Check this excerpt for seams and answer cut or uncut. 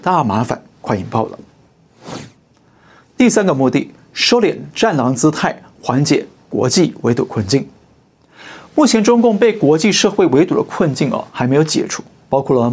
uncut